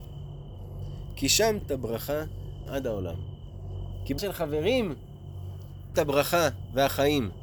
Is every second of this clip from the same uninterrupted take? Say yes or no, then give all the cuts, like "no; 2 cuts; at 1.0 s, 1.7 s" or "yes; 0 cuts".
no; 4 cuts; at 1.6 s, 2.7 s, 4.2 s, 5.9 s